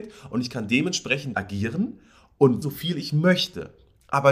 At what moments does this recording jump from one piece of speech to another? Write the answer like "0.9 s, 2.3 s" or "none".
1.3 s, 2.6 s

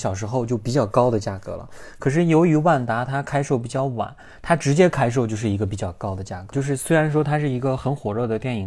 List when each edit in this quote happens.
none

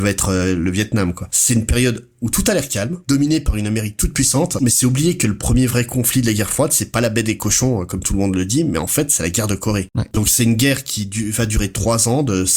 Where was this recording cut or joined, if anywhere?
3.0 s

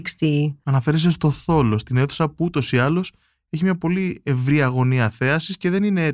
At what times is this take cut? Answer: none

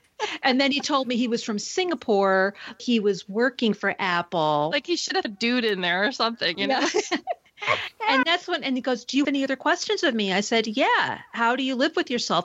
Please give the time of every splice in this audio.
2.8 s, 5.2 s, 8.2 s, 9.2 s

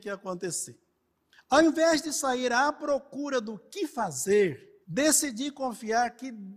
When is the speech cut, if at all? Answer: 4.8 s

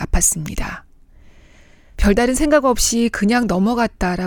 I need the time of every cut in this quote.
none

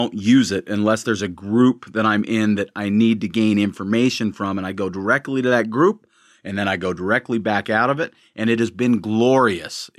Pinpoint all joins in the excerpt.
none

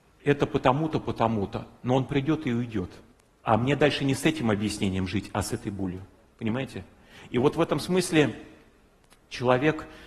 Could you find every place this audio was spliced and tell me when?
3.1 s, 6.3 s

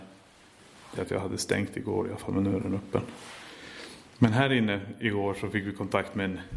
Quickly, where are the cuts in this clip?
1.0 s, 4.1 s

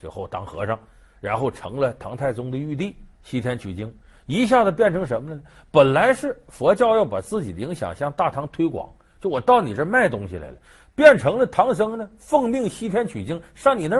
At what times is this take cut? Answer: 3.2 s

